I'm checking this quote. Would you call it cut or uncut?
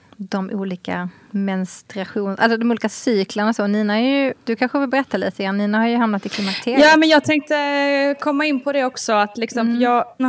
cut